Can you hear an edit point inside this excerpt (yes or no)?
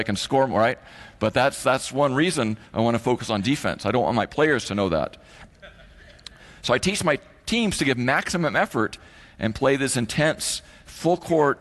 no